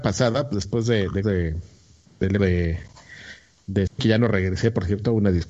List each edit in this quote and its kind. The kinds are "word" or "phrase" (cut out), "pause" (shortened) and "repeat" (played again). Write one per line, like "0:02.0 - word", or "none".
0:01.2 - word
0:02.4 - word
0:03.9 - word

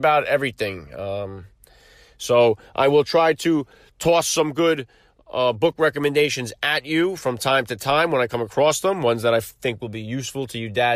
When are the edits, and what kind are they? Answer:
none

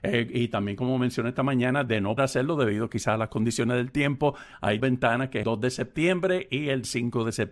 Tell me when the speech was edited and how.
0:02.2 - word
0:04.8 - word
0:05.4 - word

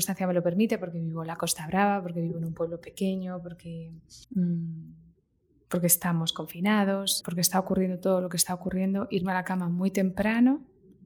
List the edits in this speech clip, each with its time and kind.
0:04.2 - pause
0:07.2 - word

